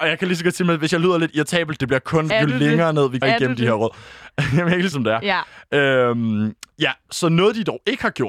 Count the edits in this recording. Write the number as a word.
three